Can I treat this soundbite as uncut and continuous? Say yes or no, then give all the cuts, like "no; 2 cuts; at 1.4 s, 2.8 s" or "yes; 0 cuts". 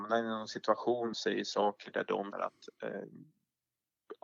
no; 2 cuts; at 1.1 s, 2.3 s